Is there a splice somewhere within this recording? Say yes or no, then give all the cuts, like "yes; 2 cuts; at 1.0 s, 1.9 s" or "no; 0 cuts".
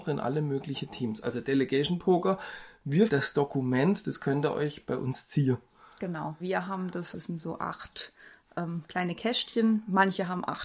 yes; 3 cuts; at 3.1 s, 6.4 s, 7.1 s